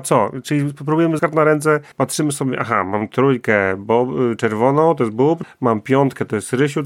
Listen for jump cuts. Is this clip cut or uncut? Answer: cut